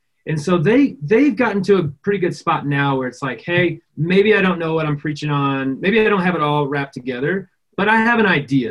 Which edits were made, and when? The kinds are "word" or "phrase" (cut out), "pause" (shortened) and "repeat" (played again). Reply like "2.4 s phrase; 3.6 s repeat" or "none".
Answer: none